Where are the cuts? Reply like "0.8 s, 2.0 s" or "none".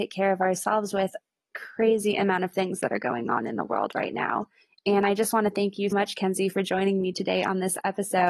1.5 s, 5.9 s